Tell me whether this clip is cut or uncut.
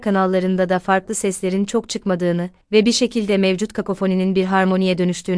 cut